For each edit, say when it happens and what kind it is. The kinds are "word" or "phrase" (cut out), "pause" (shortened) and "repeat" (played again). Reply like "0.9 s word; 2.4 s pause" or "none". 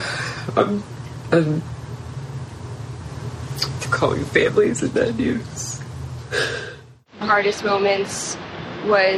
3.8 s word; 4.9 s phrase; 7.2 s phrase

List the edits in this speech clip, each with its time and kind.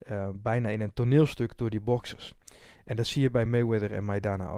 none

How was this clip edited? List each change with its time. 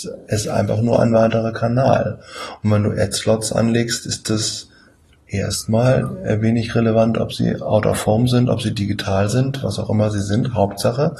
5.1 s pause

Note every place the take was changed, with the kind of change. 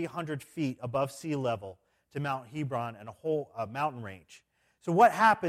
none

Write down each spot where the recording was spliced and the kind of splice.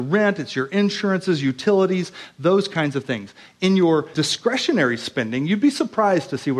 4.1 s word

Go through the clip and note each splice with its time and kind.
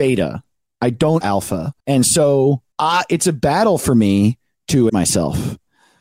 1.2 s word; 1.8 s pause; 2.7 s pause; 4.9 s word

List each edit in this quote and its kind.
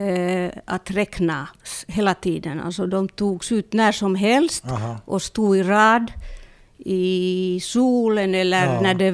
none

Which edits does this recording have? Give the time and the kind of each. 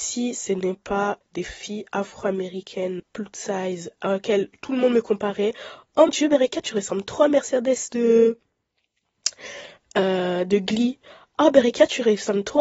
1.2 s word; 3.0 s word; 6.1 s word

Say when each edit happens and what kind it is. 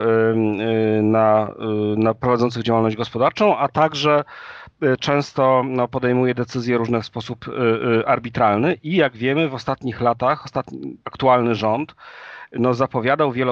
11.0 s pause

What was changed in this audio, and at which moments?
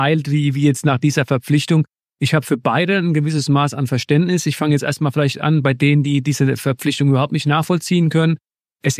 none

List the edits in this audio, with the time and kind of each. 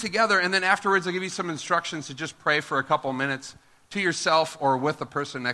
none

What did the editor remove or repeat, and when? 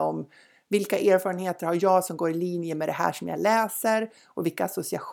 none

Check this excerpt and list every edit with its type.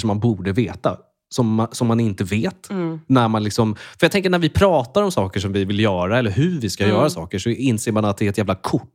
none

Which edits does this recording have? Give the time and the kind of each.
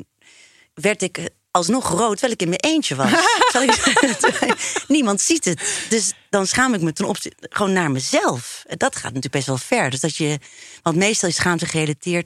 none

